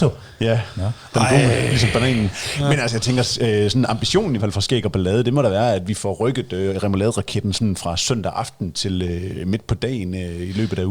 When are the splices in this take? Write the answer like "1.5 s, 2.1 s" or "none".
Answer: 4.4 s